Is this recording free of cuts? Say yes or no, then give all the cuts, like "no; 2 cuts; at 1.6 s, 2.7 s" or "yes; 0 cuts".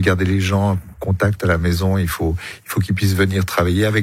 yes; 0 cuts